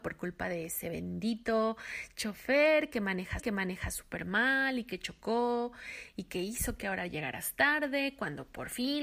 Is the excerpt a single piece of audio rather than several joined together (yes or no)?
no